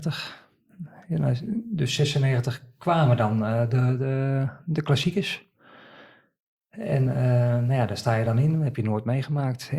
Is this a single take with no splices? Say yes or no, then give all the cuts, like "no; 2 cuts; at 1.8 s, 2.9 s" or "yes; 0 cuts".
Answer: yes; 0 cuts